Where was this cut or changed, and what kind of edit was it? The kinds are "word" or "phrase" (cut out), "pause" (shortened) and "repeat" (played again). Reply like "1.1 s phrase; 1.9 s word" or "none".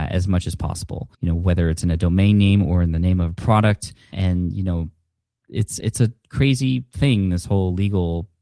1.1 s pause; 4.1 s word; 5.8 s word